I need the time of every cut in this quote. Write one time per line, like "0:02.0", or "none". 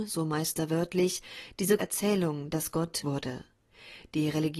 0:01.8
0:03.0